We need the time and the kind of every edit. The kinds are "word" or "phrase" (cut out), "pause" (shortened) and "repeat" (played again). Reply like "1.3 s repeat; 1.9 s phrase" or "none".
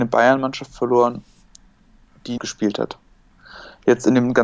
2.4 s phrase